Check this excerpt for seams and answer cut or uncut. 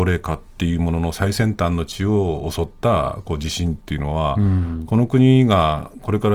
uncut